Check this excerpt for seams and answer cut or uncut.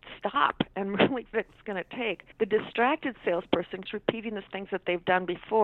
cut